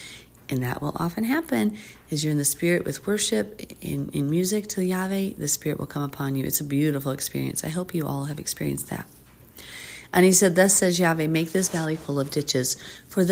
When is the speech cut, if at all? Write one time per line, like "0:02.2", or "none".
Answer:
none